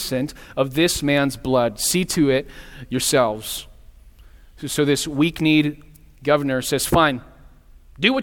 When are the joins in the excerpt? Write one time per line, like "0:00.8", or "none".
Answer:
none